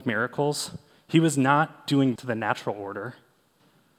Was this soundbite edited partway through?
yes; 1 cut; at 2.2 s

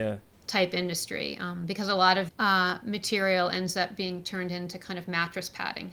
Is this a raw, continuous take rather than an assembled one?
no; 1 cut; at 2.3 s

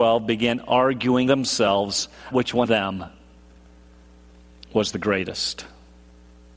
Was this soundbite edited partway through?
yes; 3 cuts; at 1.3 s, 2.3 s, 2.6 s

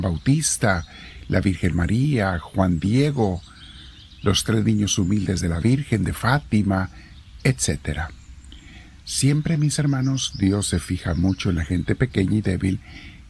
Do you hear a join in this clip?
no; 0 cuts

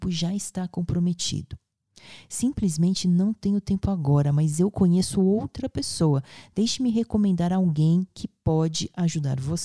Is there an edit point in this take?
no; 0 cuts

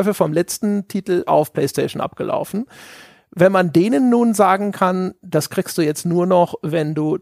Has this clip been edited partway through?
no; 0 cuts

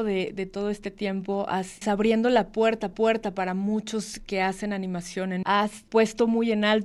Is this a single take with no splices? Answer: no; 4 cuts; at 1.8 s, 2.9 s, 5.4 s, 5.9 s

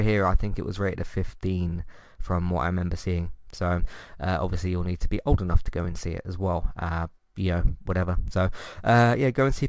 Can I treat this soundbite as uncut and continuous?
yes; 0 cuts

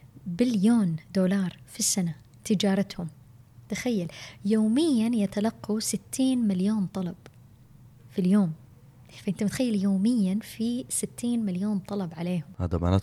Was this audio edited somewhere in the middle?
no; 0 cuts

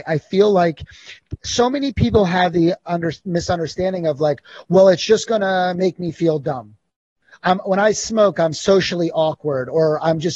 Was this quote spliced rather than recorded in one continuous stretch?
no; 0 cuts

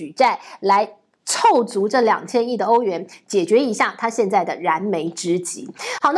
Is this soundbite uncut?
yes; 0 cuts

